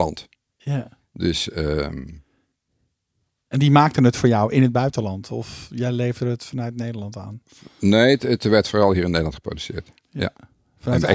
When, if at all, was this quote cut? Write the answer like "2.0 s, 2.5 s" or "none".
none